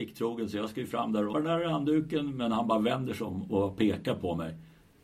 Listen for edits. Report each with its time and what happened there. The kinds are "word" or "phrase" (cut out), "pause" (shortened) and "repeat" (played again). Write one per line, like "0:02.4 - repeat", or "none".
0:01.3 - word